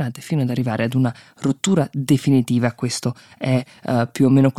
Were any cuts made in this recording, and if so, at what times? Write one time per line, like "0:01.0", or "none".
none

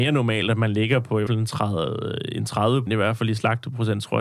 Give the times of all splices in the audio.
0:01.3
0:02.9

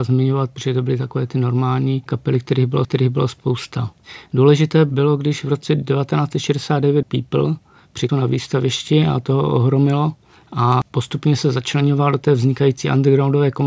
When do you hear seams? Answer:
0:02.1
0:02.8
0:07.0
0:08.1

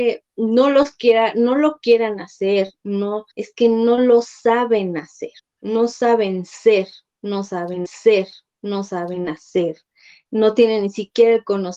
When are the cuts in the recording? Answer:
0:03.3
0:05.4
0:07.9

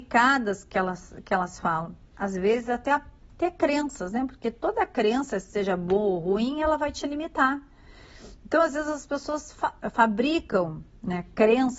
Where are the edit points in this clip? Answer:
0:02.1

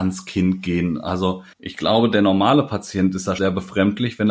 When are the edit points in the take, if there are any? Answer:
0:01.5
0:03.4

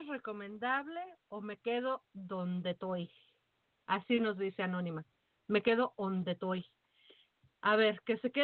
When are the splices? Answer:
none

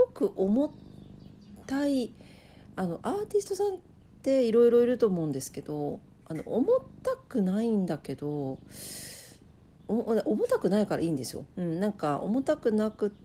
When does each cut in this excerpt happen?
0:11.5

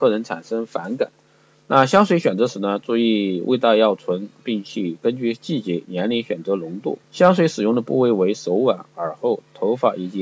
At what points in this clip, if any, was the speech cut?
0:07.0

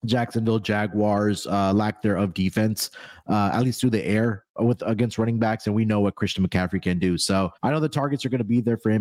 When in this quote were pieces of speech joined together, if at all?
0:07.6

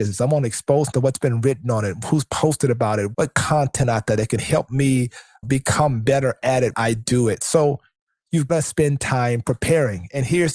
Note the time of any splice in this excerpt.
0:00.9
0:03.1
0:05.4
0:06.7
0:08.5

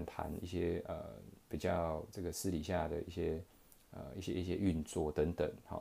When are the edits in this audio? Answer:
none

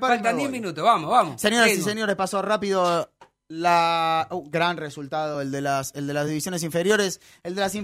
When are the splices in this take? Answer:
none

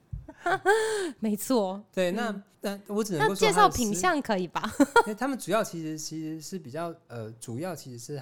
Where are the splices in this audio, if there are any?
0:02.5

